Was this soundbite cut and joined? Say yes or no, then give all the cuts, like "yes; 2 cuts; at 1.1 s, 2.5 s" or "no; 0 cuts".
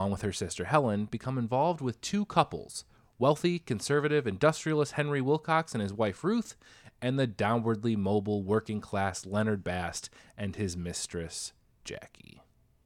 no; 0 cuts